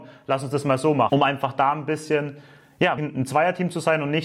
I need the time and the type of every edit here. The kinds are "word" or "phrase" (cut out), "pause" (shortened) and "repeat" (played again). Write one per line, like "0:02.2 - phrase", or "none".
0:03.0 - word